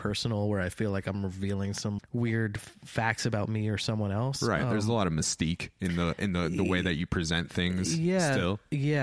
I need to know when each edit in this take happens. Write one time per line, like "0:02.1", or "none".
0:02.0